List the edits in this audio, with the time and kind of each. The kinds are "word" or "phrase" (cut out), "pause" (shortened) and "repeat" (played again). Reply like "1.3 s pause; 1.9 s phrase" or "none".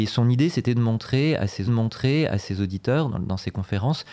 1.7 s repeat